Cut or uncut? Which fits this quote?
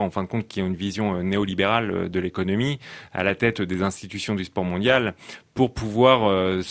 uncut